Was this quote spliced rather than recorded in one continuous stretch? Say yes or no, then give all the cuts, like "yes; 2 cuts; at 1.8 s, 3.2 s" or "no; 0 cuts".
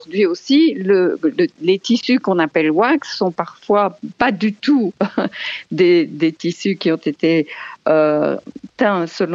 no; 0 cuts